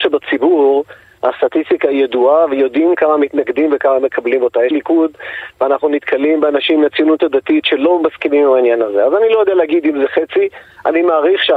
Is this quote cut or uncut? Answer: cut